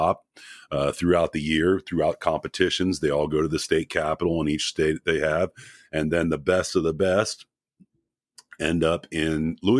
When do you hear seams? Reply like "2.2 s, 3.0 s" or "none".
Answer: none

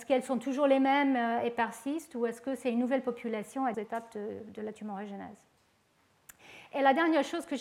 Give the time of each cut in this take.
3.7 s

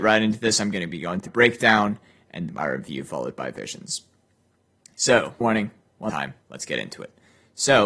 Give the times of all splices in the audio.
1.3 s, 2.5 s, 5.4 s, 6.1 s, 6.4 s

